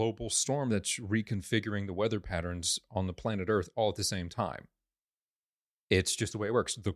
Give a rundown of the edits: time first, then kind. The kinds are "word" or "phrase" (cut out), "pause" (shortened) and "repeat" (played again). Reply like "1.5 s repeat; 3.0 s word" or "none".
none